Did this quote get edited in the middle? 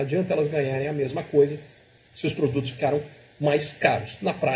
no; 0 cuts

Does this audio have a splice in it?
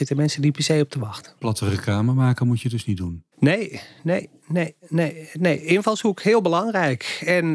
yes; 2 cuts; at 1.4 s, 3.3 s

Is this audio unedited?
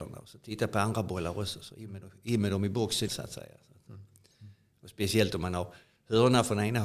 no; 1 cut; at 3.1 s

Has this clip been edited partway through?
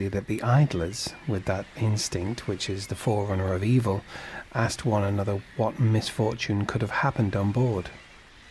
no; 0 cuts

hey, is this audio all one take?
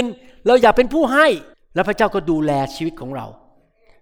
no; 1 cut; at 1.5 s

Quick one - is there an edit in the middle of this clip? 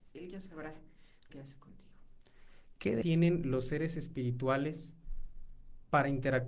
yes; 2 cuts; at 1.3 s, 3.0 s

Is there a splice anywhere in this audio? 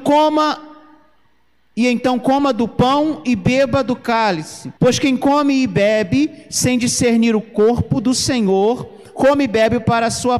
yes; 1 cut; at 4.8 s

